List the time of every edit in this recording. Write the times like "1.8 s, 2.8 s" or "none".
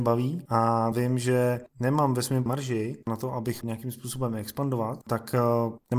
0.9 s, 1.7 s, 2.5 s, 3.6 s